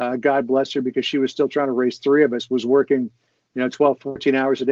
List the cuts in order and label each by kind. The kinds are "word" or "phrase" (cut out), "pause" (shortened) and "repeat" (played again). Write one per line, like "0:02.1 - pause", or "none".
none